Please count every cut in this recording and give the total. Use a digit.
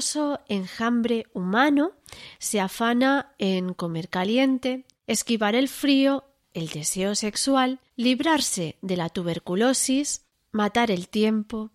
1